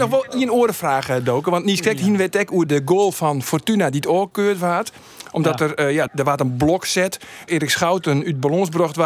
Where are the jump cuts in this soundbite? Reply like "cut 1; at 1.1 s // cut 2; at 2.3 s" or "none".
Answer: cut 1; at 2.7 s // cut 2; at 6.1 s // cut 3; at 7.5 s